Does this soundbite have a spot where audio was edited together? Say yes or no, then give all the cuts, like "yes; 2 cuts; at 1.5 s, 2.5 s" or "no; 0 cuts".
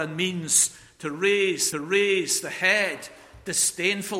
yes; 1 cut; at 1.7 s